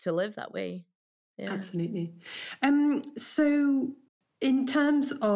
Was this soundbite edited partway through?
no; 0 cuts

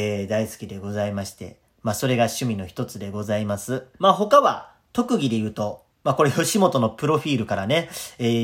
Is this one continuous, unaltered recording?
no; 2 cuts; at 3.9 s, 5.9 s

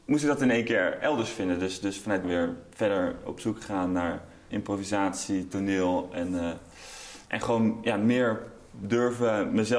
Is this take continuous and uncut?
no; 3 cuts; at 2.2 s, 4.5 s, 7.2 s

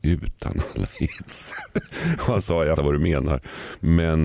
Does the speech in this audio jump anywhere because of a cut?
yes; 1 cut; at 2.8 s

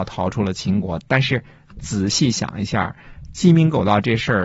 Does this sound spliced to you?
no; 0 cuts

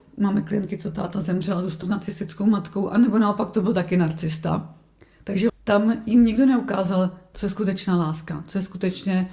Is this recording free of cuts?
no; 2 cuts; at 1.8 s, 5.5 s

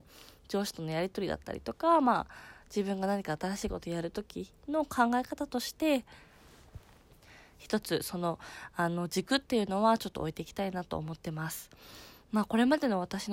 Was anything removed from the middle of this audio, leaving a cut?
no; 0 cuts

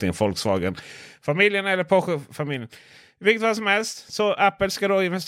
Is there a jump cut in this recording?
no; 0 cuts

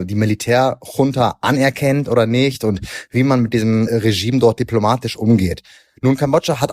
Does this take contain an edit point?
no; 0 cuts

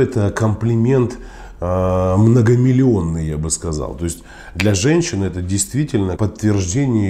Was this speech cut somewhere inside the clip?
yes; 1 cut; at 6.2 s

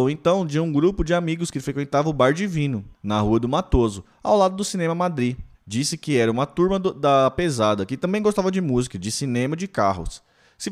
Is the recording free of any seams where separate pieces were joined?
no; 2 cuts; at 2.9 s, 5.5 s

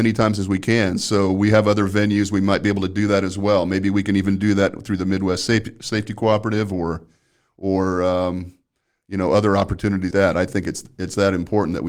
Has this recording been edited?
yes; 1 cut; at 10.1 s

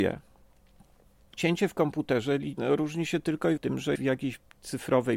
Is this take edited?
yes; 2 cuts; at 3.6 s, 4.0 s

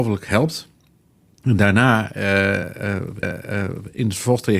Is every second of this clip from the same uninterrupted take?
no; 1 cut; at 3.2 s

